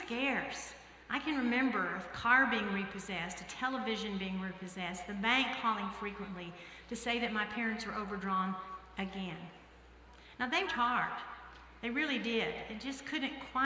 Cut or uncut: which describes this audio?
cut